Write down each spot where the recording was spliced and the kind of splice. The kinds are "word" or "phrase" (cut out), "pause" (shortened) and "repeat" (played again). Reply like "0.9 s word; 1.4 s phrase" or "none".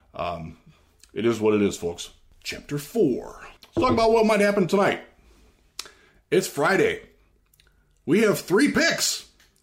3.6 s pause